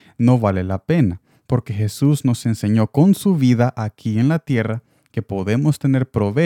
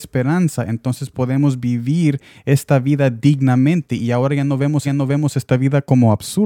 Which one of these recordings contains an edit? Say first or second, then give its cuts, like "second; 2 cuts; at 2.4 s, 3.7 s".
second; 1 cut; at 4.8 s